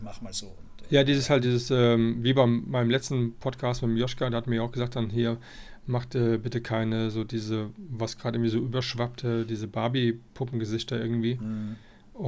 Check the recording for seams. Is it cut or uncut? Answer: uncut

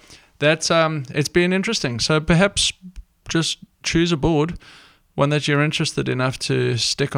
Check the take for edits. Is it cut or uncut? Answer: uncut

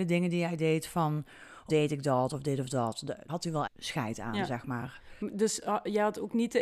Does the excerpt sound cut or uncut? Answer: cut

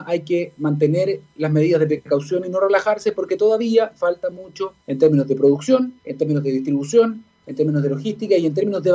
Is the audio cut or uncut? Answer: cut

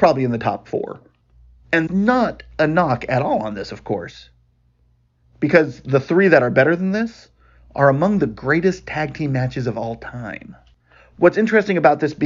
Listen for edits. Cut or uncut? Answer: cut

